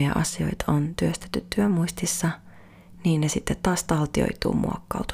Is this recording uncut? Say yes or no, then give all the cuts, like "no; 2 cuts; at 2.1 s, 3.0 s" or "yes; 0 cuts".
yes; 0 cuts